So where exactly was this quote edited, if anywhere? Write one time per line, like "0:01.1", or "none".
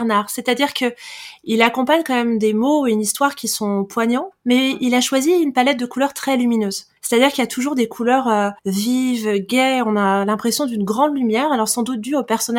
0:07.0
0:08.6